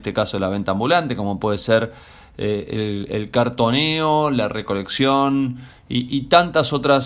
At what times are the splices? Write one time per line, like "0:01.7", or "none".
none